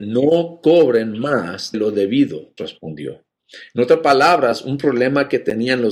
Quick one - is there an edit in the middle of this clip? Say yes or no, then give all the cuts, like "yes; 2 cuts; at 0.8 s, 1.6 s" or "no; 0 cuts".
yes; 2 cuts; at 1.7 s, 2.6 s